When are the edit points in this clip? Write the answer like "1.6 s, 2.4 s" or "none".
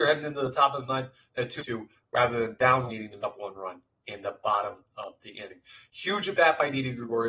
1.3 s, 1.6 s, 2.9 s, 3.2 s